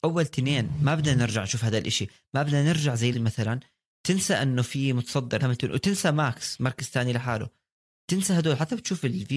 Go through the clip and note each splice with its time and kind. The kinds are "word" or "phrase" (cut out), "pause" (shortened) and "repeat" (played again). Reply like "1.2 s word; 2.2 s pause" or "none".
3.1 s phrase; 5.4 s word